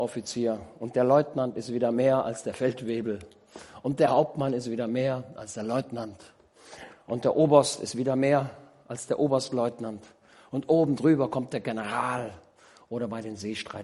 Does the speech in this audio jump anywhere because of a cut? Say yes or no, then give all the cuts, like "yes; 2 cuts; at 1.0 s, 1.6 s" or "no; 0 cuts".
no; 0 cuts